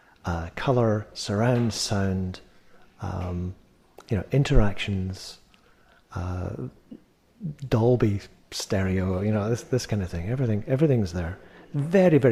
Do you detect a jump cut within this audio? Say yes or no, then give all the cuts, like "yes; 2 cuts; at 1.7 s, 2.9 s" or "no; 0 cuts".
no; 0 cuts